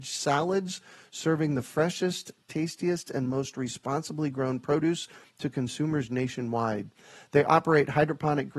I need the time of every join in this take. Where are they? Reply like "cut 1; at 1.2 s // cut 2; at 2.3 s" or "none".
none

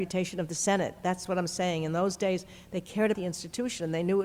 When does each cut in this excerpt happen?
cut 1; at 3.1 s

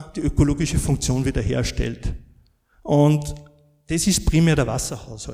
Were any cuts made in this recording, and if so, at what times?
none

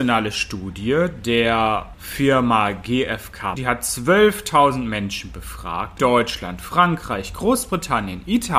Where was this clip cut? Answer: cut 1; at 3.5 s // cut 2; at 6.0 s

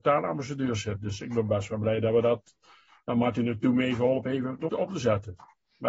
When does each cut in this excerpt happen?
cut 1; at 4.7 s

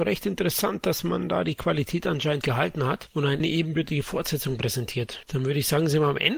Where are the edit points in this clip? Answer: cut 1; at 2.4 s

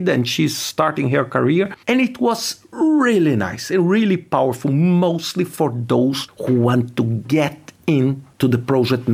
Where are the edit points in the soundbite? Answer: cut 1; at 1.8 s

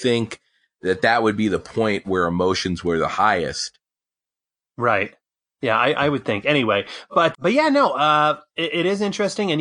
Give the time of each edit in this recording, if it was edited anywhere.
cut 1; at 7.3 s

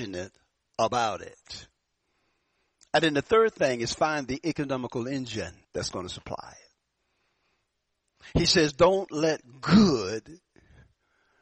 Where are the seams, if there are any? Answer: cut 1; at 5.6 s

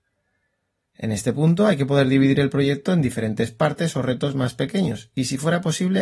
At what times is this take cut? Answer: none

